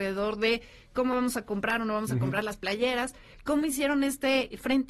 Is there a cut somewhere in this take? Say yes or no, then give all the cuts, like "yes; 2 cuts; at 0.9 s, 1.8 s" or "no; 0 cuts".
no; 0 cuts